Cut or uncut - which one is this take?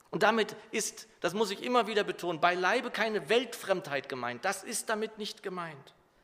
uncut